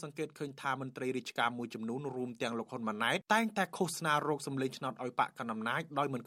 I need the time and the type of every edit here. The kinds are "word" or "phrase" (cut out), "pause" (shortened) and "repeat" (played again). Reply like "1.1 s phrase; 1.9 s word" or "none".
3.2 s pause